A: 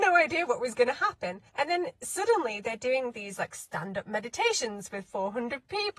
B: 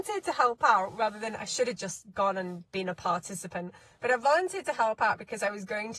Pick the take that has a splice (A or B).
A